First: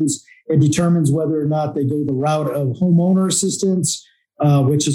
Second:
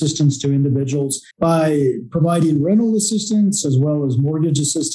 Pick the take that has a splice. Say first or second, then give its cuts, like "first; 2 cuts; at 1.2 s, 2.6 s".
second; 1 cut; at 1.3 s